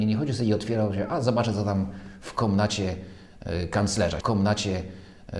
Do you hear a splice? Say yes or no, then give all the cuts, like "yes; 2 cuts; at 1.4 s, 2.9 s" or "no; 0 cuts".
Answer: yes; 1 cut; at 4.2 s